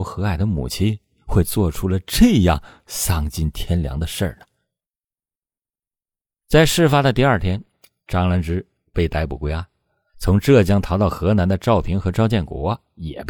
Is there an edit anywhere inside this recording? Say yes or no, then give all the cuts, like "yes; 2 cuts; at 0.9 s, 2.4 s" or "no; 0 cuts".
no; 0 cuts